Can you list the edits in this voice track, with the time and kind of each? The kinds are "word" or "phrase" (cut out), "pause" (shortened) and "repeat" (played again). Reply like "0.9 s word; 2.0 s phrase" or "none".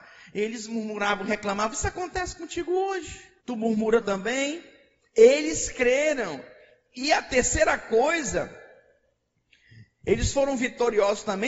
3.4 s pause; 4.0 s phrase